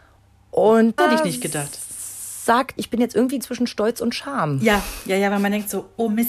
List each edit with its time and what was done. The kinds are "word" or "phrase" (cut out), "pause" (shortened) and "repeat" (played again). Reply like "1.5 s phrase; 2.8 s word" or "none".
1.0 s word; 2.8 s word; 3.4 s word